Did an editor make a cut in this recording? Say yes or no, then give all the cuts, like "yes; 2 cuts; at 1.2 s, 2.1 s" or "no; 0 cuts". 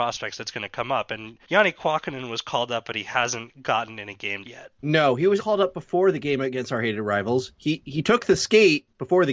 yes; 4 cuts; at 1.4 s, 4.4 s, 4.8 s, 5.4 s